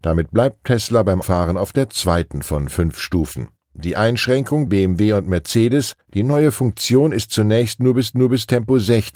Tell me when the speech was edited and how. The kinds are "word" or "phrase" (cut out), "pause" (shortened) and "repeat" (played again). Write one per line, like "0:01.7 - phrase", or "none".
0:01.2 - word
0:04.7 - word
0:06.0 - pause
0:08.1 - repeat